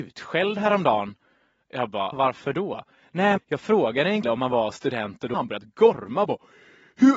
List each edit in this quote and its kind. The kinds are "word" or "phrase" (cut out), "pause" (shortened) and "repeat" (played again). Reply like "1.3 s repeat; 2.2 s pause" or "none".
2.1 s word; 3.4 s word; 4.2 s word; 5.3 s word